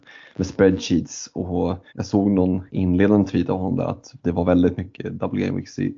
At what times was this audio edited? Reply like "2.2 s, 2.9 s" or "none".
1.9 s, 2.7 s